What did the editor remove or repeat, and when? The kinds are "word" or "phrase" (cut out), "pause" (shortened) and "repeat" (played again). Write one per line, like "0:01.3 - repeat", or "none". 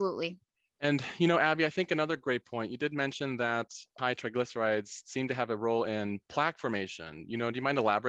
none

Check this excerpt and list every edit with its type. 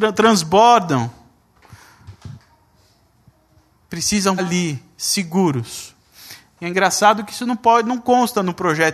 0:04.4 - word

